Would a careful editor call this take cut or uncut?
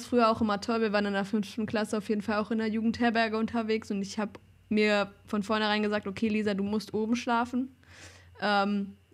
uncut